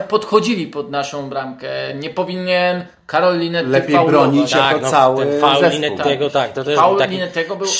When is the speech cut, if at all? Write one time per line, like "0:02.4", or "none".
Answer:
none

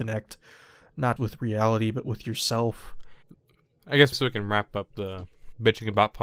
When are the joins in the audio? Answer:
0:01.2
0:04.1

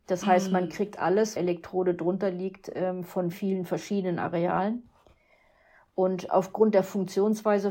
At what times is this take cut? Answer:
0:01.4
0:03.3

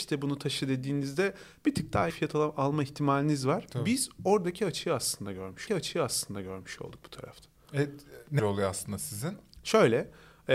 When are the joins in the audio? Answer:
0:02.1
0:05.7
0:08.4

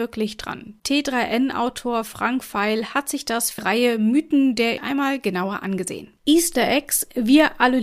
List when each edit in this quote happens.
0:03.6
0:04.8
0:06.2

